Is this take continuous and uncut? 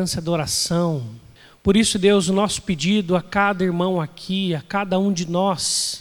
yes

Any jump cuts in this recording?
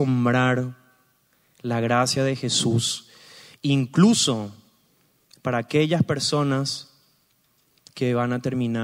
no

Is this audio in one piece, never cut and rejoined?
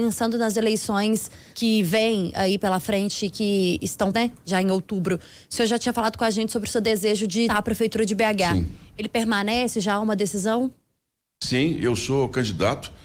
no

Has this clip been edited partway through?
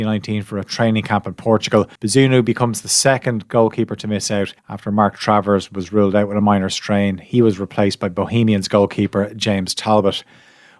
yes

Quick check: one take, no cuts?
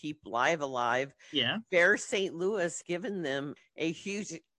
no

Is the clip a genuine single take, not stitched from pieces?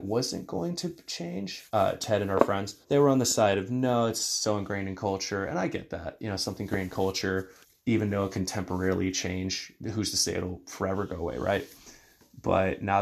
no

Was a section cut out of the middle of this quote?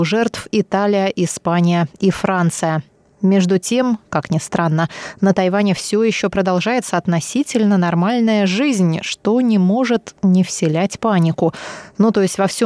no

